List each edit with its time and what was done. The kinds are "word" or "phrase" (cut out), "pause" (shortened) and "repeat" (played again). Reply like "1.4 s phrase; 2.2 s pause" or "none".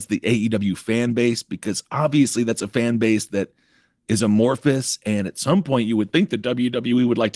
none